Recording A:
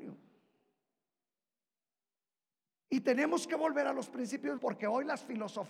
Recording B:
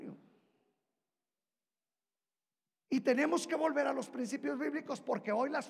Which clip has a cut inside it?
A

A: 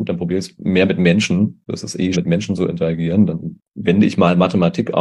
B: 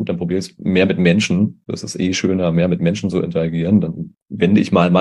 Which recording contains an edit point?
A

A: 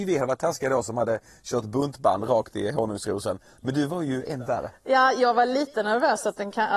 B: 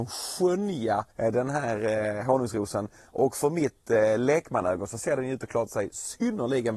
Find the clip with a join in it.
B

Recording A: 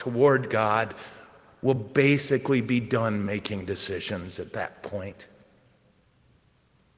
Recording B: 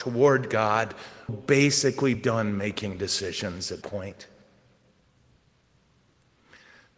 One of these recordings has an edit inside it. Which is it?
B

